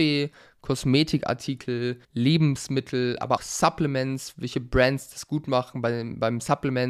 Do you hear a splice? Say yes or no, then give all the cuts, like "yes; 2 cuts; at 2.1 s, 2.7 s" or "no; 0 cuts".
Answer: yes; 2 cuts; at 2.0 s, 3.4 s